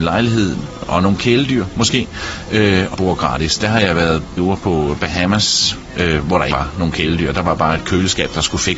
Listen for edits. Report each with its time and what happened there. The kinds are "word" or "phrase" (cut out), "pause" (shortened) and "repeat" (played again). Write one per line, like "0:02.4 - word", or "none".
0:02.9 - word
0:04.4 - word
0:06.5 - word

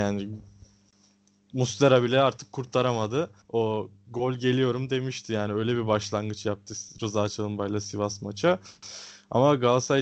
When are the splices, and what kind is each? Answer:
0:03.4 - pause

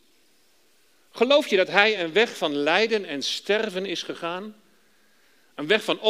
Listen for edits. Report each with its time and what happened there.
none

